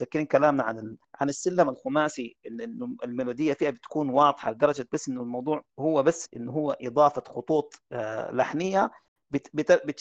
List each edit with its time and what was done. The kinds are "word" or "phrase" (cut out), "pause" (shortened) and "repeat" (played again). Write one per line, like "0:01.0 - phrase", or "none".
0:01.0 - pause
0:05.7 - pause